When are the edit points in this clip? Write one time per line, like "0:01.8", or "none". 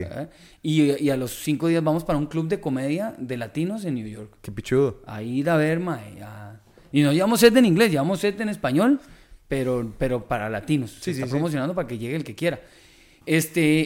none